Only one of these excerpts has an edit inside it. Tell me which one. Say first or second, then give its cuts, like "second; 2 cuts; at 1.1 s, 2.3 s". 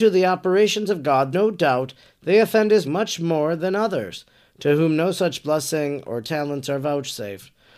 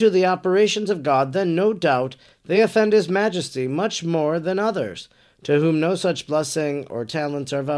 first; 2 cuts; at 1.3 s, 2.8 s